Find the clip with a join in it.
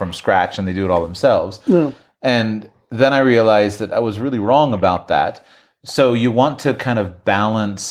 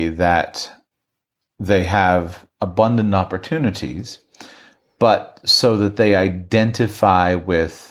second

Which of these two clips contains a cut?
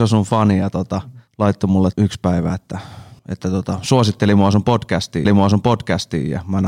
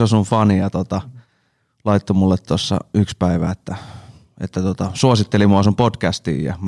first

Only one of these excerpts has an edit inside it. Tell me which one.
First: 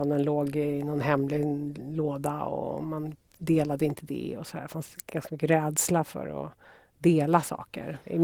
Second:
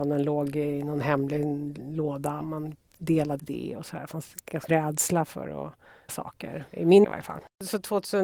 second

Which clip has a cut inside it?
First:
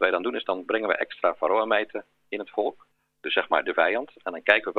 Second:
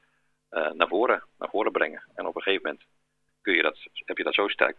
first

